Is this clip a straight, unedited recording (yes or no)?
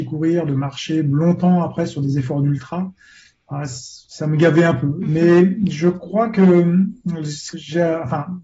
no